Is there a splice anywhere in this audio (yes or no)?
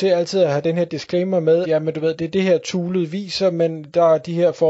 yes